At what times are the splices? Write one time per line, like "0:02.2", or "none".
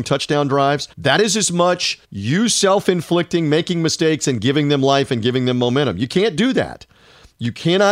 0:00.9
0:02.0